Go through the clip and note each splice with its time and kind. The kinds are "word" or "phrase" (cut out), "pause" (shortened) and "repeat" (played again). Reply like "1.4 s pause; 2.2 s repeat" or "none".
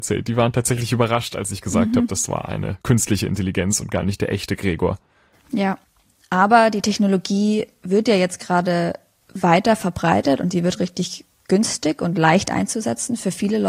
none